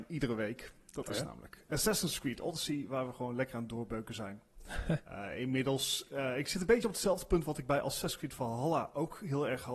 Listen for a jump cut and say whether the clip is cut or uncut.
uncut